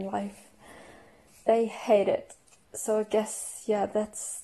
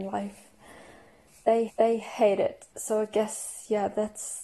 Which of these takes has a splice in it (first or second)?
second